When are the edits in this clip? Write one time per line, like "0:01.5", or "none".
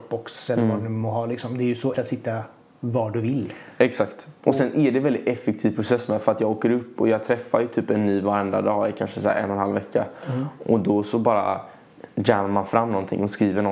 0:01.9